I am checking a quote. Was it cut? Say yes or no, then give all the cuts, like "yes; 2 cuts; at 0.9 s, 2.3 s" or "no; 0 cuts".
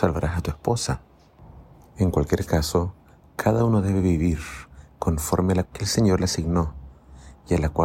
yes; 1 cut; at 5.6 s